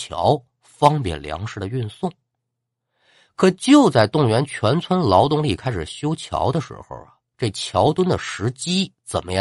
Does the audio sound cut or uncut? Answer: uncut